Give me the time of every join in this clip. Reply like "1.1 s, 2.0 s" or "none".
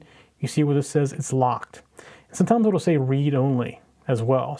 none